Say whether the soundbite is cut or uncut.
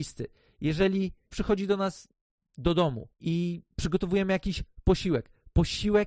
cut